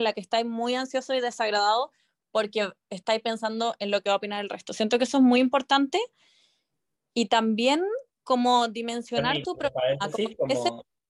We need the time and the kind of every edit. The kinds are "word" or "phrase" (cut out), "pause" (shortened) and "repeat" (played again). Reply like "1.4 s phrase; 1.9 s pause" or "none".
none